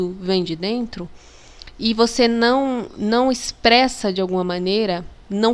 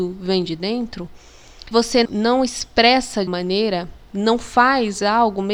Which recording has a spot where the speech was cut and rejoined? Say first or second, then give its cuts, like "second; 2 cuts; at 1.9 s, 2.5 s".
second; 3 cuts; at 1.7 s, 2.0 s, 3.3 s